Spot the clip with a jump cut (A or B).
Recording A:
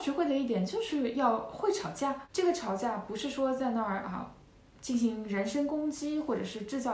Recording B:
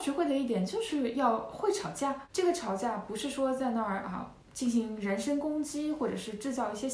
B